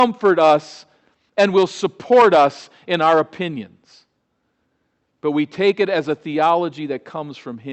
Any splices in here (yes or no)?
no